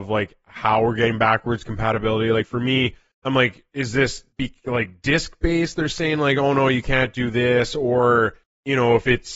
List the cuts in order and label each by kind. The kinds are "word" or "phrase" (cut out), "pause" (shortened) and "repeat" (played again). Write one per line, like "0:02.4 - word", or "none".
0:03.1 - pause
0:04.3 - pause
0:08.4 - pause